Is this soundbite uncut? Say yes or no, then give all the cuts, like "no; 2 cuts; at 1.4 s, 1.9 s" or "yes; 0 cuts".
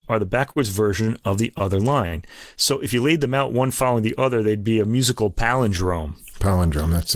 yes; 0 cuts